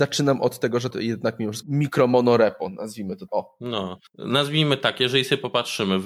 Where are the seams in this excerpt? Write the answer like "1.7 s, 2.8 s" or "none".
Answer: 0.9 s, 1.6 s, 3.3 s, 4.1 s